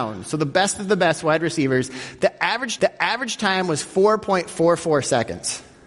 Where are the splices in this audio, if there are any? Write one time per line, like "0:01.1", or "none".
0:02.8